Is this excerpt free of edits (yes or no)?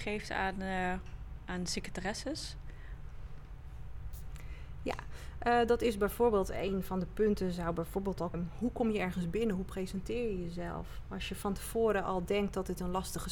no